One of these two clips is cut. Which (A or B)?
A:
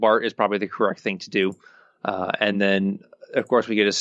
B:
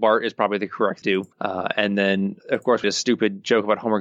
B